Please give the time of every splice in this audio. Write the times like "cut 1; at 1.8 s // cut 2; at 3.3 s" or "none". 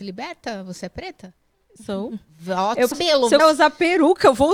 cut 1; at 2.9 s // cut 2; at 3.4 s

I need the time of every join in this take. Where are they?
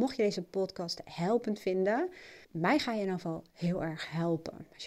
cut 1; at 2.4 s

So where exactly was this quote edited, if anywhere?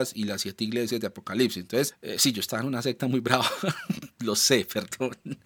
none

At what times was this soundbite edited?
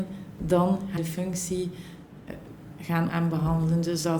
cut 1; at 1.0 s // cut 2; at 3.1 s

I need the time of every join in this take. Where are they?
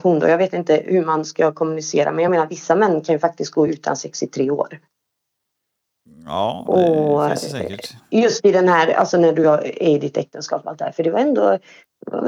none

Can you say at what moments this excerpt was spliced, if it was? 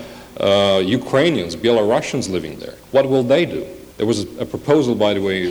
cut 1; at 2.8 s // cut 2; at 3.9 s

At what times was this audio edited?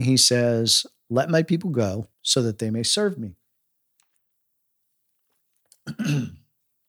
cut 1; at 2.1 s

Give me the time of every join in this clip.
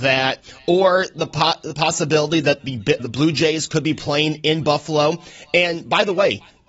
cut 1; at 3.0 s

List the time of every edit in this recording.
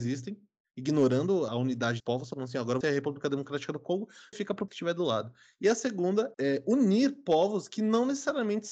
cut 1; at 1.5 s // cut 2; at 2.0 s // cut 3; at 2.8 s // cut 4; at 4.3 s // cut 5; at 4.7 s // cut 6; at 6.3 s

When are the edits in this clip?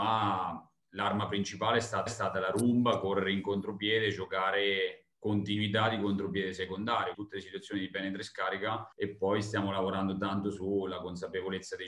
cut 1; at 2.1 s // cut 2; at 5.1 s // cut 3; at 7.1 s // cut 4; at 8.9 s

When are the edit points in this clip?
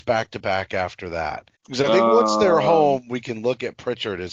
cut 1; at 1.5 s

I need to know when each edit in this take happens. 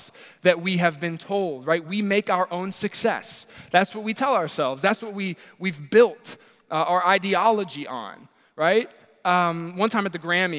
none

